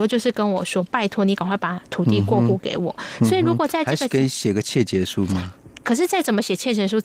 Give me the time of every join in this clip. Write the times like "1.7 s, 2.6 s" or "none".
5.8 s